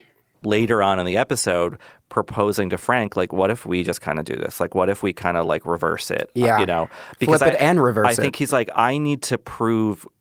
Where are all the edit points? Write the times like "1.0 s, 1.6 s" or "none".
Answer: none

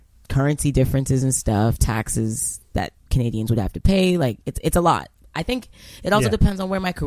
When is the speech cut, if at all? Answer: none

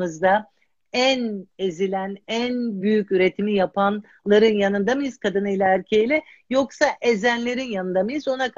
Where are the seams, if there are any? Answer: none

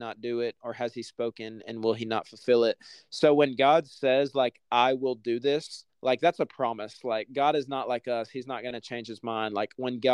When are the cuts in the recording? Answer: 5.9 s

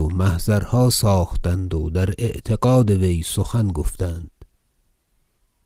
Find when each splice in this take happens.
none

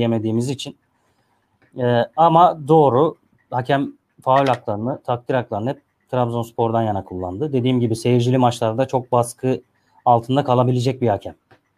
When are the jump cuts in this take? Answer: none

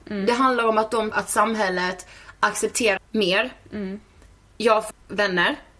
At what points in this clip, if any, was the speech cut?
1.1 s, 3.0 s, 4.9 s

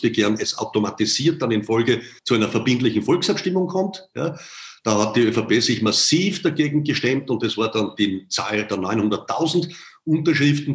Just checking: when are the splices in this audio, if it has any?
2.2 s

